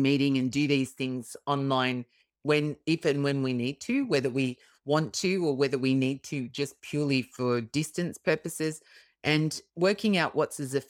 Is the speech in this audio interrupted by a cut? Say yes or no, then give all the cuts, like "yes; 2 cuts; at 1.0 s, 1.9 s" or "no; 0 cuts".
no; 0 cuts